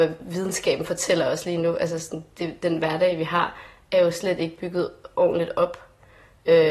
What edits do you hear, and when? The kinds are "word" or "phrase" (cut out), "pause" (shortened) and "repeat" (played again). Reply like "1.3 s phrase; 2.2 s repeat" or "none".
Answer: none